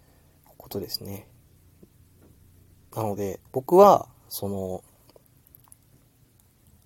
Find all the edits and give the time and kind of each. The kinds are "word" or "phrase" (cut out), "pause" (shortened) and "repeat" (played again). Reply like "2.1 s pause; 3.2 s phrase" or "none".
3.5 s pause